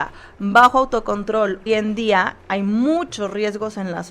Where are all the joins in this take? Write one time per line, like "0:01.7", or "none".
0:01.7